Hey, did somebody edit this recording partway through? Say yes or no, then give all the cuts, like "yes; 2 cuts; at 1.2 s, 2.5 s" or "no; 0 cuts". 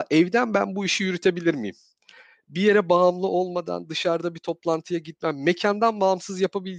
no; 0 cuts